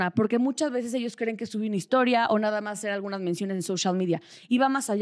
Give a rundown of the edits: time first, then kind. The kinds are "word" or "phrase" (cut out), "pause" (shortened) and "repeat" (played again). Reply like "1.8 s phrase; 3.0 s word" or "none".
none